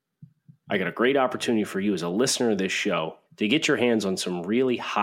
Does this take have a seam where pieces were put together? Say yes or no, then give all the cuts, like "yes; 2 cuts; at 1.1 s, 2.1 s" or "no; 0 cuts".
yes; 1 cut; at 3.3 s